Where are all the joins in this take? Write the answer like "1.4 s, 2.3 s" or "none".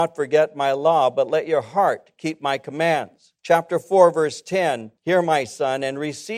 3.4 s, 5.0 s